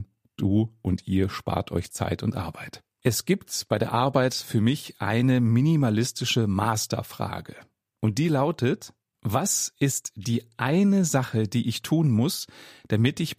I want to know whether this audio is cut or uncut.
uncut